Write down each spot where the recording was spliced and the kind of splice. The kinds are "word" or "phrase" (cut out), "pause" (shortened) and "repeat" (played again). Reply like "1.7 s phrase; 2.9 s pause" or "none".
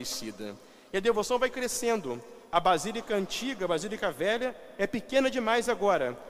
2.4 s pause